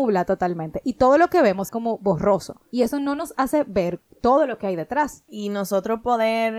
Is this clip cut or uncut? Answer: cut